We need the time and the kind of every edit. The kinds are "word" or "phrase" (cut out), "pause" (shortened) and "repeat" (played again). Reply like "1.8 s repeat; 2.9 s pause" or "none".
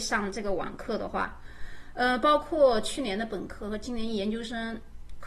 none